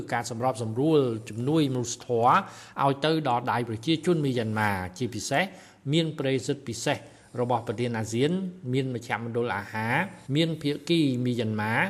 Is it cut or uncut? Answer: cut